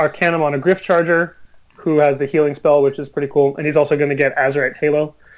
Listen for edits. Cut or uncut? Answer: uncut